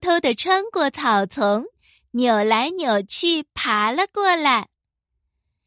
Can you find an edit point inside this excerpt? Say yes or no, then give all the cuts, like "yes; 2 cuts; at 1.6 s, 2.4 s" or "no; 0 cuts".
no; 0 cuts